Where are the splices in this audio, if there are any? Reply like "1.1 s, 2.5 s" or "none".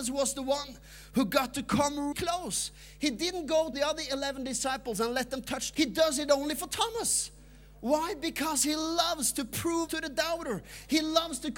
2.1 s, 3.7 s, 5.7 s, 9.9 s